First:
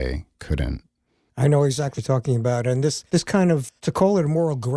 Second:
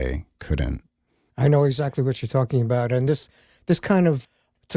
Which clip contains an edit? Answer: first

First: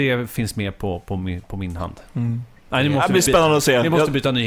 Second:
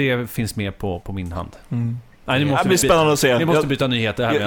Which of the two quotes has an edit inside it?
second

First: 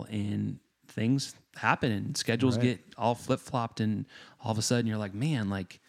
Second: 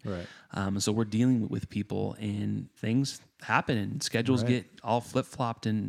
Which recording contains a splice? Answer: second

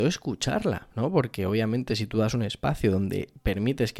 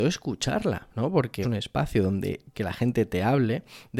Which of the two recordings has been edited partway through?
second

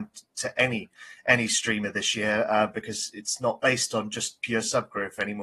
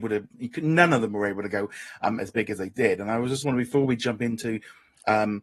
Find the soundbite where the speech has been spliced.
second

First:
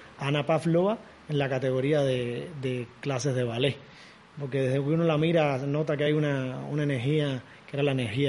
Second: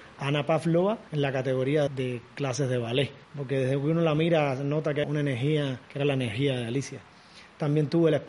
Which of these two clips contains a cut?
second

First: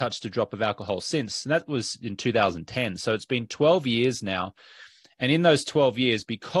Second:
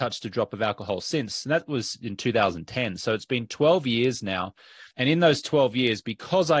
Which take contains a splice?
second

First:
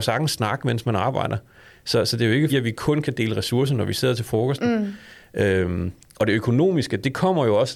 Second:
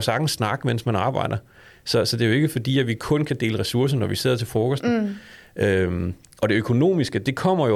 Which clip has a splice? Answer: first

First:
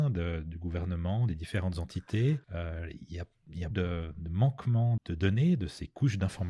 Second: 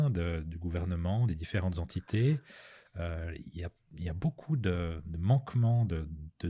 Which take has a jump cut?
first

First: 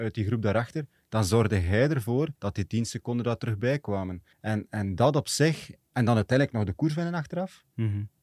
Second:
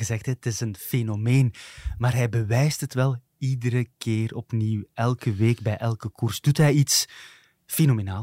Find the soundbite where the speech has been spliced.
first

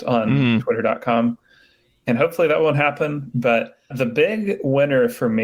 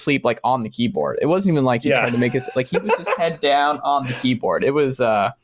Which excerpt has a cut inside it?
first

